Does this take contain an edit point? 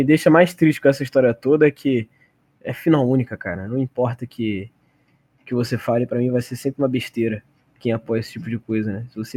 yes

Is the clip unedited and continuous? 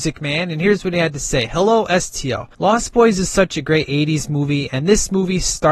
no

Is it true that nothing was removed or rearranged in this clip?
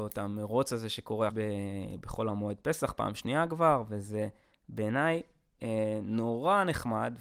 no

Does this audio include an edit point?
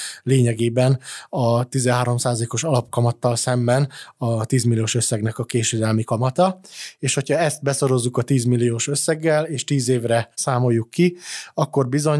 yes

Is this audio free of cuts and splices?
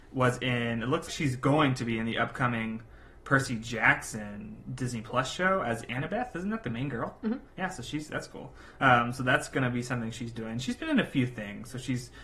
no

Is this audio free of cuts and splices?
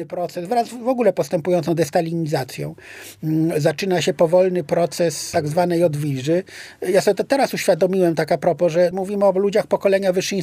yes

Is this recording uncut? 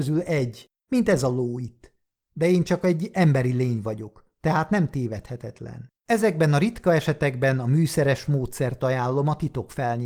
no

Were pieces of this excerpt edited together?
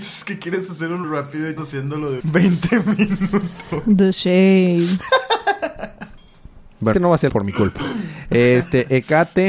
yes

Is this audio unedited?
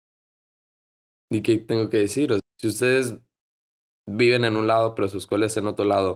no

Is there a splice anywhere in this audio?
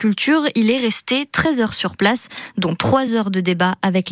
no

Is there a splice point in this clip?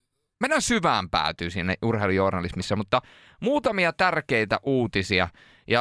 no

